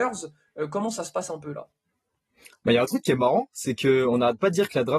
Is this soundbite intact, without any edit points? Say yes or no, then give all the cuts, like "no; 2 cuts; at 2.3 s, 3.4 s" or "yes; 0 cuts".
yes; 0 cuts